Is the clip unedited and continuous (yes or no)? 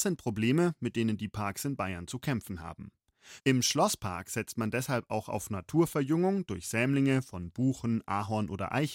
yes